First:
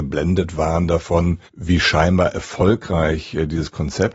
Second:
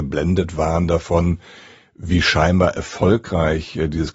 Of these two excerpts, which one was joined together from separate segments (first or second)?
first